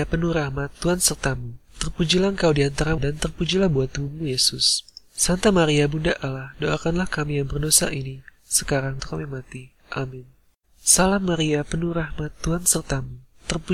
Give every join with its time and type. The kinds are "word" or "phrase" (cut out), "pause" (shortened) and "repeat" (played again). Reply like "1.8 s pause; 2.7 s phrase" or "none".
3.0 s word; 9.0 s word